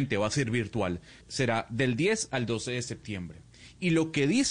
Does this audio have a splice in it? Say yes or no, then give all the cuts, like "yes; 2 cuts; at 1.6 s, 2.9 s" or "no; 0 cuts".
yes; 1 cut; at 1.2 s